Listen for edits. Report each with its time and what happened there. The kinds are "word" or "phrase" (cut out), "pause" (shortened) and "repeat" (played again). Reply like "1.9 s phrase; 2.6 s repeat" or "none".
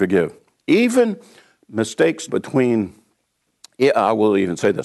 2.3 s word

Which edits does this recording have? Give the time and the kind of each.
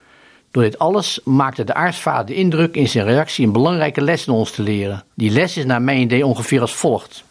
5.1 s pause

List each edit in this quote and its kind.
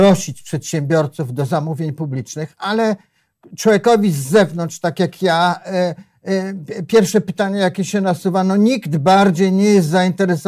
none

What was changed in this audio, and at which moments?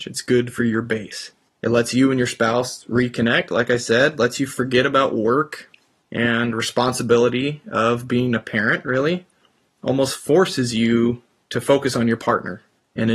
none

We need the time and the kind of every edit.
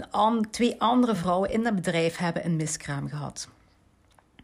none

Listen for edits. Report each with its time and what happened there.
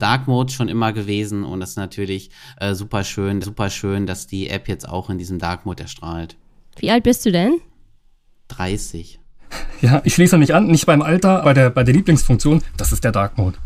3.4 s repeat; 10.0 s word; 11.4 s word

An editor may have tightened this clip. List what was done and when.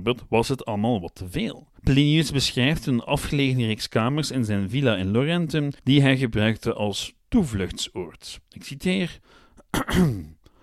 1.8 s pause; 5.8 s pause; 8.5 s pause

